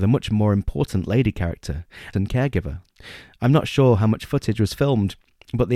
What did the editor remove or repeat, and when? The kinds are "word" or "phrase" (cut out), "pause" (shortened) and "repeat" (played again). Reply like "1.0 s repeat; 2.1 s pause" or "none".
2.1 s phrase